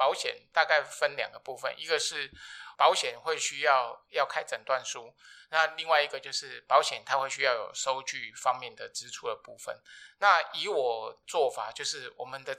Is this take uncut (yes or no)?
yes